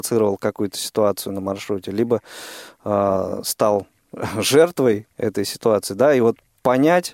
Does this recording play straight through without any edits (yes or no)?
yes